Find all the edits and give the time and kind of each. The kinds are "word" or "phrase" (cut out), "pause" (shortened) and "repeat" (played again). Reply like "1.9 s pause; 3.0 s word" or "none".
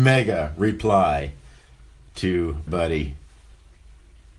2.7 s word